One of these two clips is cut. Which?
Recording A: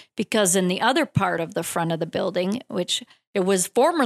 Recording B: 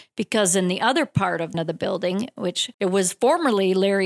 B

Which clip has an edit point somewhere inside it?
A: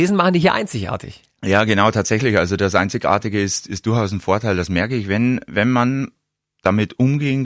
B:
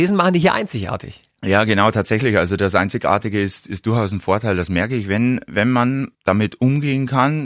B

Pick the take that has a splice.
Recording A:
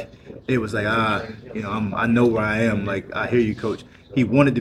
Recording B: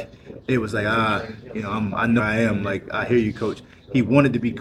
B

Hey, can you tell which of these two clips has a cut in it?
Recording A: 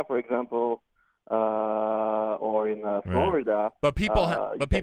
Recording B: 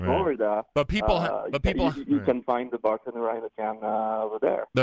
B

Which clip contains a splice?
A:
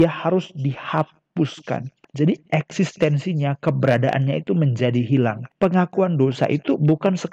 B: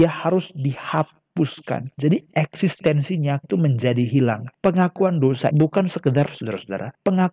B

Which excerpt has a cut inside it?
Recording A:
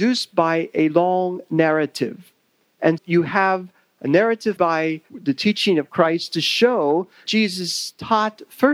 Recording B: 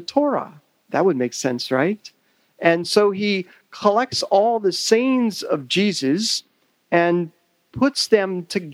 A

